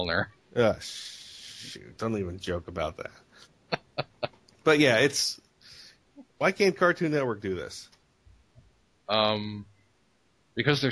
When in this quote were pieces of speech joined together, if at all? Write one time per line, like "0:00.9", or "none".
none